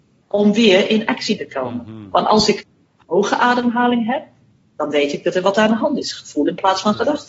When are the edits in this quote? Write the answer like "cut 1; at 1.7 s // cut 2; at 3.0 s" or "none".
cut 1; at 1.4 s // cut 2; at 2.9 s